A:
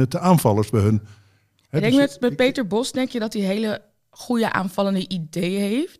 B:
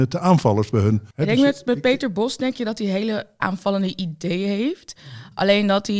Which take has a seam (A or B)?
B